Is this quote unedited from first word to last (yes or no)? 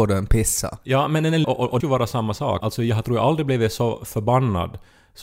no